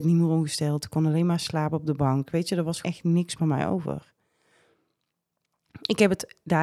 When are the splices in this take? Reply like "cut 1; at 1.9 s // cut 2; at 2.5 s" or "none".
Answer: cut 1; at 2.8 s // cut 2; at 3.4 s